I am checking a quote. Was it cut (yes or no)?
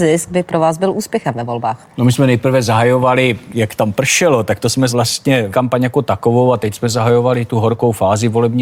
yes